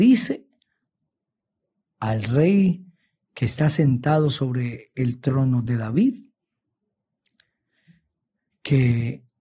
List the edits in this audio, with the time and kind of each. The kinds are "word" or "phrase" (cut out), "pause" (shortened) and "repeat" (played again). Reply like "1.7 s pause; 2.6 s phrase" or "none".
none